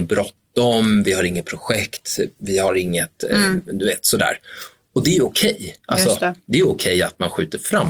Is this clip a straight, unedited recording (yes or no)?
no